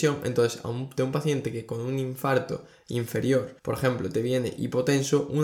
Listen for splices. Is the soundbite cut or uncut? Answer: cut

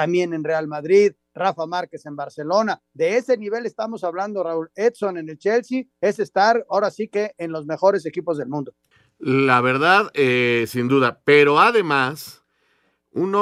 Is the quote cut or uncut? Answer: cut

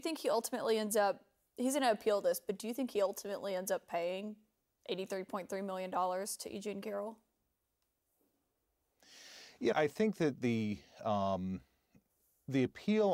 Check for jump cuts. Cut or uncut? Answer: cut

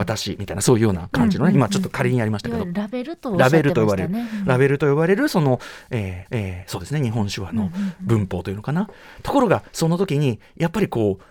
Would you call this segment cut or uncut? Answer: cut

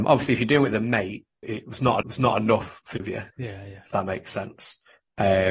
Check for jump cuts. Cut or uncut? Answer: cut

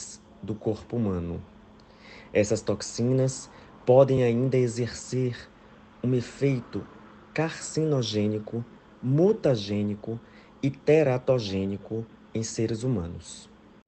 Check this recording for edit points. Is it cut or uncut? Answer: uncut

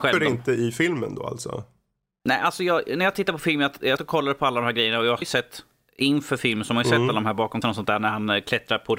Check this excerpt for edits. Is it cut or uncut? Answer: cut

